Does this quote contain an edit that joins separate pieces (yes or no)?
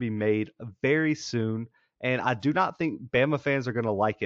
no